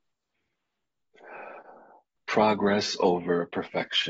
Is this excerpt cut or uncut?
uncut